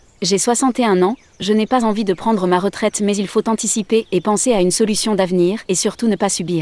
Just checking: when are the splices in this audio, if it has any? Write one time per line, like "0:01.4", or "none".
0:05.7